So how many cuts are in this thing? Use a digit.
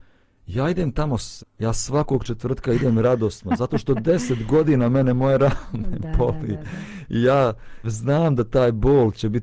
2